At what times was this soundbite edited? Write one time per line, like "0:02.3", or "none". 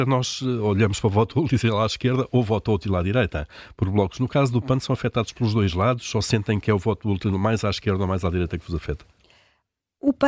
none